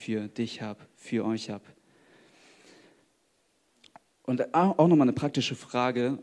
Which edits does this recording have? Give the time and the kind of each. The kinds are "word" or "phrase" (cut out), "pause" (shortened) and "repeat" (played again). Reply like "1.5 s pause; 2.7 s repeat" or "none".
none